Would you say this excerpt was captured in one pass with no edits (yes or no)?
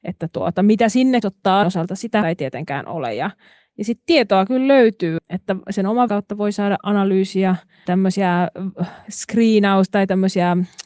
no